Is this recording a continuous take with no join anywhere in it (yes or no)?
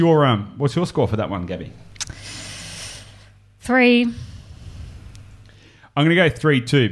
yes